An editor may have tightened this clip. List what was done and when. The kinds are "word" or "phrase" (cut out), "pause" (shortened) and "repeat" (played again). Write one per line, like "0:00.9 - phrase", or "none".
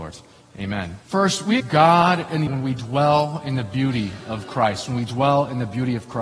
0:01.0 - pause
0:01.6 - word
0:02.5 - word